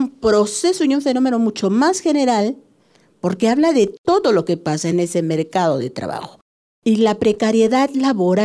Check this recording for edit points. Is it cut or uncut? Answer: uncut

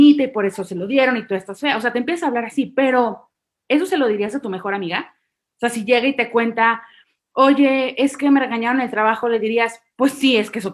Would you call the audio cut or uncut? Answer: uncut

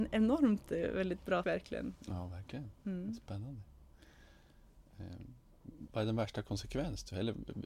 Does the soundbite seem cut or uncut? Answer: cut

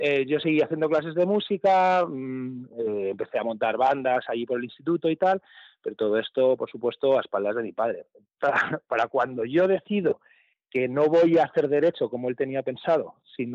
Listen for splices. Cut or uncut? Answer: uncut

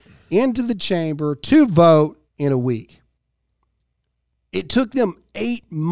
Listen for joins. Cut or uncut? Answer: cut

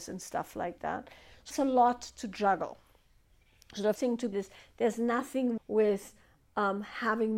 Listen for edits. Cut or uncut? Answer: cut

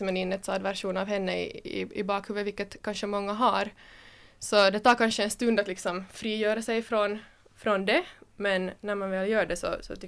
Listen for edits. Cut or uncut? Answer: uncut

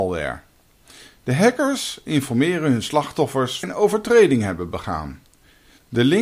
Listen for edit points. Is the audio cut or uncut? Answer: cut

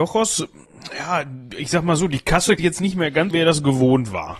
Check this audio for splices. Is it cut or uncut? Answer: cut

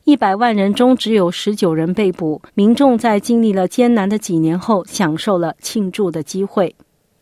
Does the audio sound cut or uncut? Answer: cut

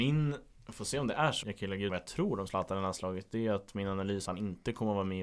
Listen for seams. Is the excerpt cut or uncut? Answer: cut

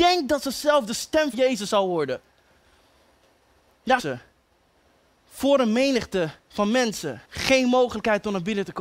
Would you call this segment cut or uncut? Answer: cut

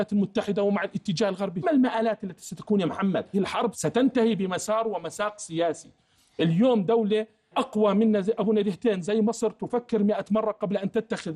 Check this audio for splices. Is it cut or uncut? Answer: cut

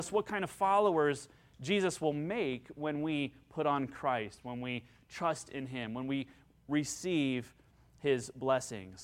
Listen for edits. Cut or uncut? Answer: uncut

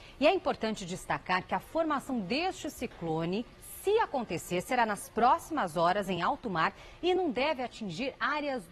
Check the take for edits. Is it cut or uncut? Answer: uncut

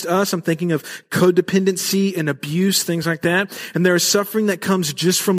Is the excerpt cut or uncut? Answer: uncut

